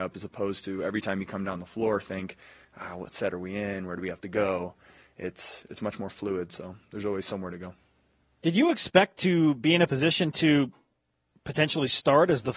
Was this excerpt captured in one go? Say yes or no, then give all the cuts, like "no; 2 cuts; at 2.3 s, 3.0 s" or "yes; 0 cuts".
yes; 0 cuts